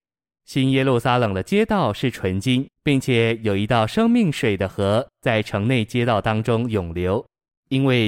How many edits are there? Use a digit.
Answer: 1